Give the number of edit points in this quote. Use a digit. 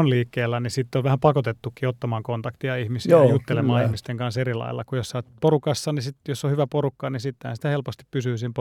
1